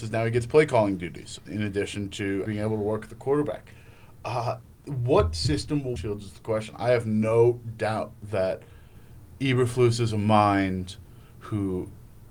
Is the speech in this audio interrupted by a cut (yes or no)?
yes